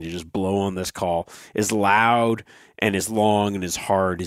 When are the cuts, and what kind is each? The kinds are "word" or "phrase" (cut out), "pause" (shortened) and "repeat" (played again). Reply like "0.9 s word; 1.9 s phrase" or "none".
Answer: none